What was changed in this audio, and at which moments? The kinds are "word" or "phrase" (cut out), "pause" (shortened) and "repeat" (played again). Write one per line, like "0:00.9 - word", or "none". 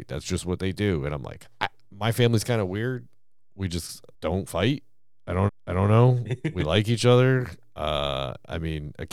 0:01.5 - word
0:04.1 - pause
0:05.5 - repeat